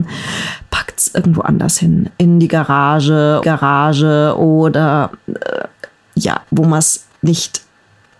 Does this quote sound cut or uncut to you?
cut